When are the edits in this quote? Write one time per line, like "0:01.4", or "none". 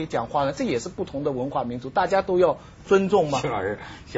none